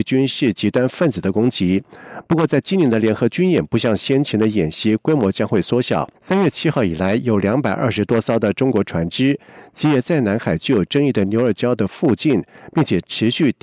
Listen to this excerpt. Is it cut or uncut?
cut